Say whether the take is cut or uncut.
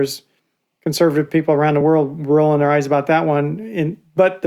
uncut